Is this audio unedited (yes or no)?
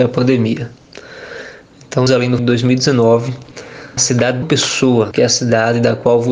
no